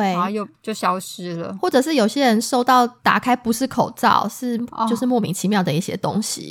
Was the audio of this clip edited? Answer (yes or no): yes